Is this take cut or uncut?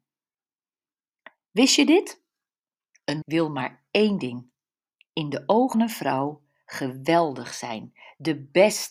cut